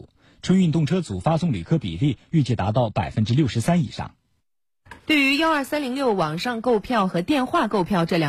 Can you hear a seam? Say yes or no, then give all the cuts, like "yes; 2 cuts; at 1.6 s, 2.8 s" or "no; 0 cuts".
yes; 1 cut; at 5.0 s